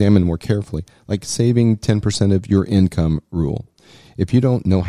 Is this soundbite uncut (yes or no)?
yes